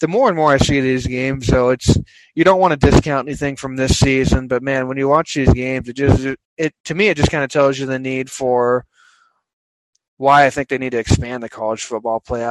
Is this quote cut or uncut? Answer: uncut